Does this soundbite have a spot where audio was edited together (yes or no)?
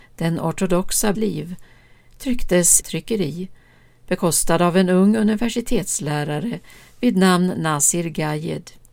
yes